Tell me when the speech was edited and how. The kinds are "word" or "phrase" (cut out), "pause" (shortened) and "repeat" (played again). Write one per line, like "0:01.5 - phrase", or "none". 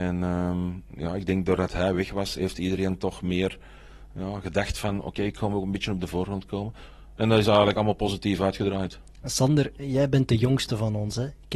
none